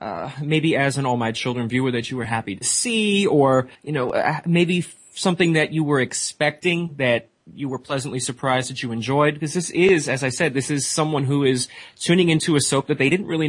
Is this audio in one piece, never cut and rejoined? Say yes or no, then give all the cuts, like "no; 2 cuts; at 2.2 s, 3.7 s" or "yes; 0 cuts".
no; 2 cuts; at 3.7 s, 7.4 s